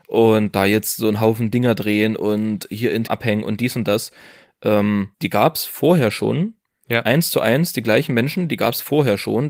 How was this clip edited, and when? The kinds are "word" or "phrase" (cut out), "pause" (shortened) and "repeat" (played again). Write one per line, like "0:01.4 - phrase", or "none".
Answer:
0:03.1 - word
0:05.1 - pause
0:06.7 - pause